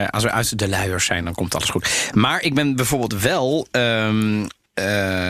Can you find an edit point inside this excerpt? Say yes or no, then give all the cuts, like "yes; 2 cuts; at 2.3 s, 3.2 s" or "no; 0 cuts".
no; 0 cuts